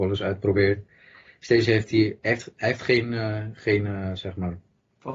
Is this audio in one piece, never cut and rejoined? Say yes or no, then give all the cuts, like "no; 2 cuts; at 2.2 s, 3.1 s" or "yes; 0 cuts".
yes; 0 cuts